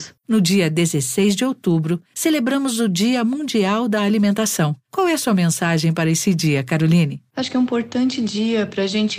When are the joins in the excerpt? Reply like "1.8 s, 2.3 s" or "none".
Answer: none